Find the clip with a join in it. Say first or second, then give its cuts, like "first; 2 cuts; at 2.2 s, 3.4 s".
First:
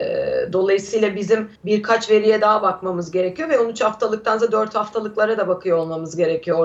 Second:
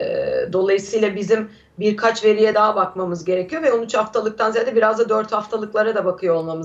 first; 2 cuts; at 1.6 s, 4.4 s